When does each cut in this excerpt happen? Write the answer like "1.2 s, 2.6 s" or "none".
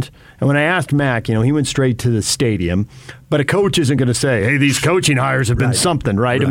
none